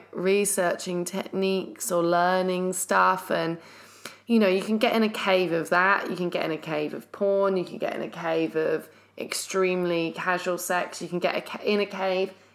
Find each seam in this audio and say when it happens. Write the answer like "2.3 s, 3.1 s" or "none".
none